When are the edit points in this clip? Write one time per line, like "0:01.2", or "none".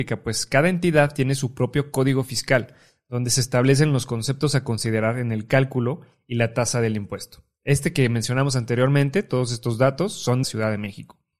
0:10.4